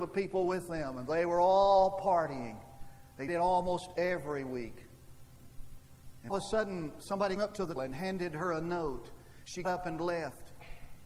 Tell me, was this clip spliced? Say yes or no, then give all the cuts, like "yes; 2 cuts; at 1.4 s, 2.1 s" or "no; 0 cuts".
yes; 5 cuts; at 3.3 s, 6.3 s, 7.4 s, 7.8 s, 9.6 s